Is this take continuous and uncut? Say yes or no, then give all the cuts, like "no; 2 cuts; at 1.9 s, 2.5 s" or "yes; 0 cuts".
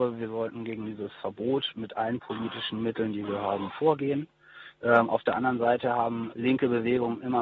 no; 1 cut; at 6.3 s